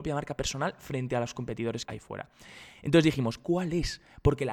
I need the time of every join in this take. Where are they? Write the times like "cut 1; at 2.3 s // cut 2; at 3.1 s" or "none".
cut 1; at 1.8 s

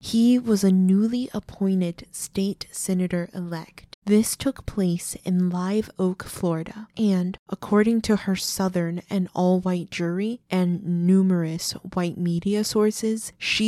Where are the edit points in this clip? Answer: cut 1; at 3.9 s

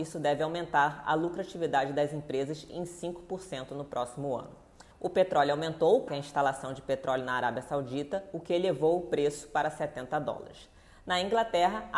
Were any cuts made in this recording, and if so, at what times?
cut 1; at 4.9 s // cut 2; at 6.1 s

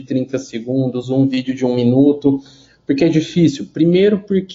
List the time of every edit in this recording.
none

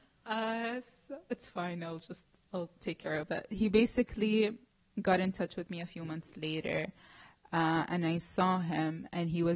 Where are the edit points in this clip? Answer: none

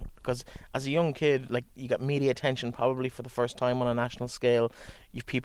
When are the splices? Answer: none

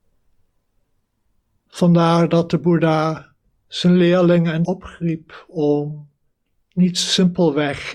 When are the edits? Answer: cut 1; at 4.6 s

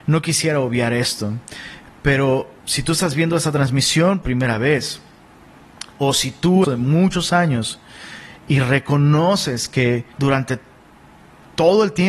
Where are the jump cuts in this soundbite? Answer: cut 1; at 2.6 s // cut 2; at 4.2 s // cut 3; at 6.6 s // cut 4; at 8.4 s // cut 5; at 10.1 s

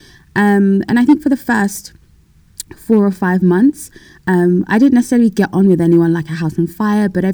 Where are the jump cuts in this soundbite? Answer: none

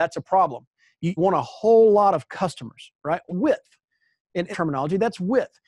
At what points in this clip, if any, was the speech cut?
cut 1; at 1.2 s // cut 2; at 3.3 s // cut 3; at 4.5 s

